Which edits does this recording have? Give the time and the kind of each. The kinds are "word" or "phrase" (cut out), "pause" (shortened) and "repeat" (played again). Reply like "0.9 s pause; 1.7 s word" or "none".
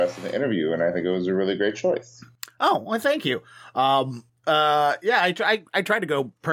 4.3 s pause